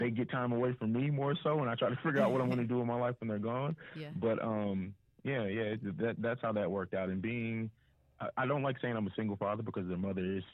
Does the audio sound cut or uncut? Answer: uncut